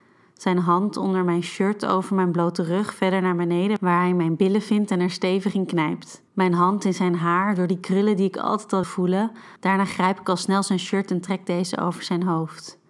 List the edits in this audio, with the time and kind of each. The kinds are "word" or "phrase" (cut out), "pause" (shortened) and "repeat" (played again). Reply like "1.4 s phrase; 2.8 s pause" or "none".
6.3 s pause; 8.8 s word; 9.6 s pause